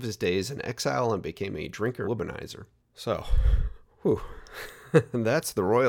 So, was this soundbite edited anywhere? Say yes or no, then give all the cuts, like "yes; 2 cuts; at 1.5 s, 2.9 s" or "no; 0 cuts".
yes; 1 cut; at 2.0 s